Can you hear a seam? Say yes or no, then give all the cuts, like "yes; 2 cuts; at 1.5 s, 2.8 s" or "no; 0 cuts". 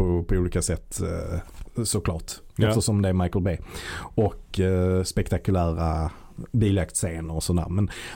no; 0 cuts